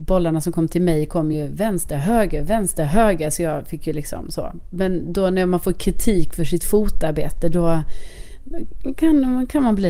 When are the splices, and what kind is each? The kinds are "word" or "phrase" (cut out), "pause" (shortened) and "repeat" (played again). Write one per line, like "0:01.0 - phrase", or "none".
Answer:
none